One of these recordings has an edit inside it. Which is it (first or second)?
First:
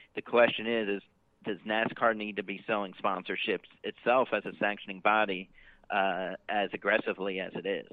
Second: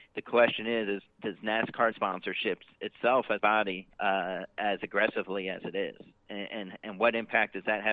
second